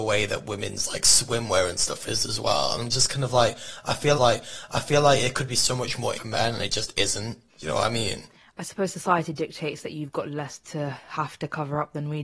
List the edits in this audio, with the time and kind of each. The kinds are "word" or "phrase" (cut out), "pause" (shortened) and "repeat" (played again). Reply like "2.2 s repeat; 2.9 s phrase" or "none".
4.1 s repeat; 6.1 s word; 7.5 s pause